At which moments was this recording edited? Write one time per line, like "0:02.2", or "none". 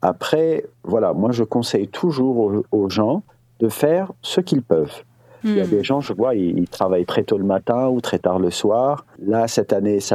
none